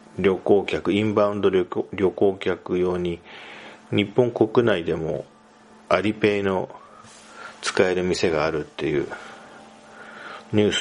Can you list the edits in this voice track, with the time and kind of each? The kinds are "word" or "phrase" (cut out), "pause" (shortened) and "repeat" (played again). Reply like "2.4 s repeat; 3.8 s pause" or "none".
5.7 s pause